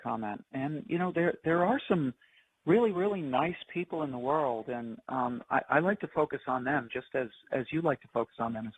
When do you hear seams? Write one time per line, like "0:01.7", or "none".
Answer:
none